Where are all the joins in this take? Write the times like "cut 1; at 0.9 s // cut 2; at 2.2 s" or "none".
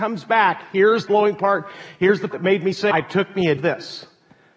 cut 1; at 1.1 s // cut 2; at 2.3 s // cut 3; at 2.9 s // cut 4; at 3.6 s